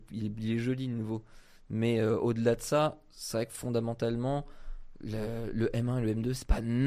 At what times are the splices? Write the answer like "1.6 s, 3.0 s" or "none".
none